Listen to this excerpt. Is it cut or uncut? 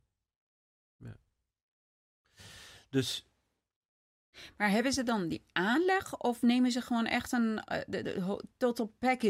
cut